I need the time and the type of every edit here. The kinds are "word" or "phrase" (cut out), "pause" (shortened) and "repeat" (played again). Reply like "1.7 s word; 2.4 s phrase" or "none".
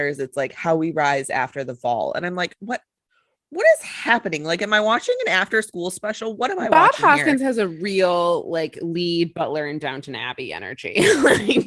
none